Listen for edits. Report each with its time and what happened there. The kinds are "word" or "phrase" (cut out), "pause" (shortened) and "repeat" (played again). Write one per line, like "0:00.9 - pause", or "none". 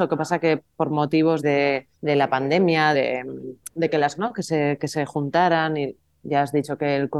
0:01.4 - word
0:01.9 - pause
0:02.9 - word
0:04.2 - phrase